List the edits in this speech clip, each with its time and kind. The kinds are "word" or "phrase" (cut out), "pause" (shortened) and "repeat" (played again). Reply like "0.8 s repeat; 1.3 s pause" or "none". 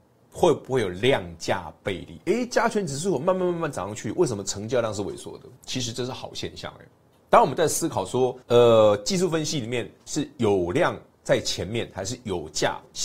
5.6 s pause; 7.1 s pause; 8.4 s pause